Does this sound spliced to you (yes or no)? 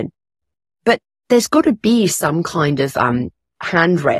no